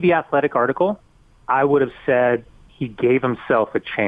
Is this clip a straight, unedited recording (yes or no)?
yes